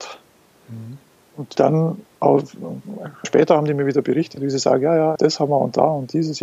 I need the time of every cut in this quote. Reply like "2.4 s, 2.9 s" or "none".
1.5 s, 3.2 s, 5.1 s